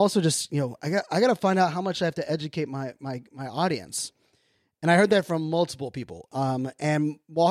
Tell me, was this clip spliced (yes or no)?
no